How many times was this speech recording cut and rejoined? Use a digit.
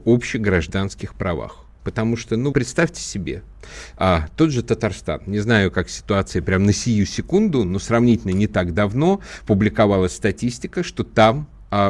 1